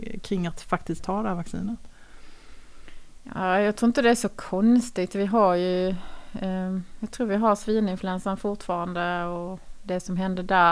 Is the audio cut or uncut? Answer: cut